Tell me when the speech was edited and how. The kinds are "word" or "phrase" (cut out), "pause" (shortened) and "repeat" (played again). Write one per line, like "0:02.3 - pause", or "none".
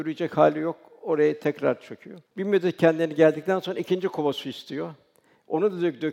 0:02.3 - pause